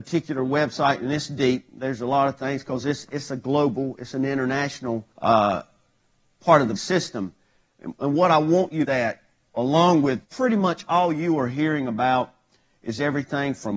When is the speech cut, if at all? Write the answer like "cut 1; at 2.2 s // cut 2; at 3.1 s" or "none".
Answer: cut 1; at 5.1 s // cut 2; at 6.8 s // cut 3; at 8.8 s // cut 4; at 10.2 s